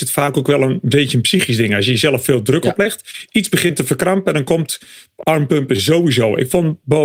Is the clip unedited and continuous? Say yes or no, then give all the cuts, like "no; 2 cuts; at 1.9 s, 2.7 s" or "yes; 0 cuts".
yes; 0 cuts